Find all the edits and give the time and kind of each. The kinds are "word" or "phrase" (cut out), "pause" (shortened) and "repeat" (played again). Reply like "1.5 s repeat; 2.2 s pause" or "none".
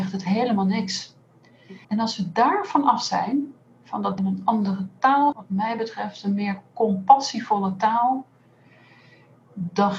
1.8 s pause; 4.2 s phrase; 5.3 s phrase